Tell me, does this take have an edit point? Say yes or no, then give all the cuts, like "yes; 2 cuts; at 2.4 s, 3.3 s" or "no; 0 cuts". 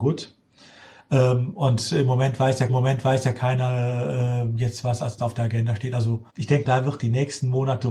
yes; 4 cuts; at 2.7 s, 5.2 s, 6.3 s, 6.6 s